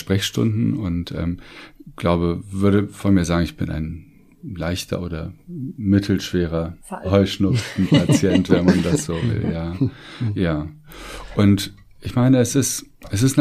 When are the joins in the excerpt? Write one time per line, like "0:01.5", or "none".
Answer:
0:06.8

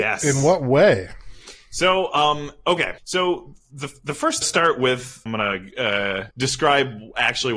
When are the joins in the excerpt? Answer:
0:03.0
0:04.4
0:05.3
0:06.3

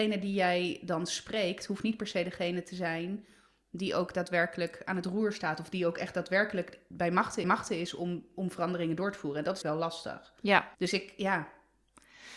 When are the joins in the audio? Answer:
0:06.9
0:07.4
0:09.6
0:10.7

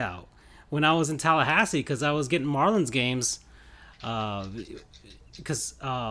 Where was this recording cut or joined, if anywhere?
none

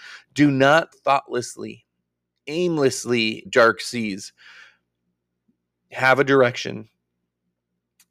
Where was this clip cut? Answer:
0:00.9
0:03.4

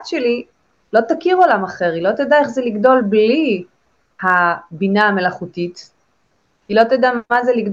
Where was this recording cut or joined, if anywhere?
none

